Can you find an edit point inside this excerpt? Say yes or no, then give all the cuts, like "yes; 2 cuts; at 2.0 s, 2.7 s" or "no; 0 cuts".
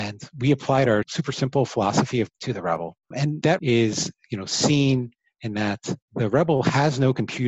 yes; 2 cuts; at 2.3 s, 3.6 s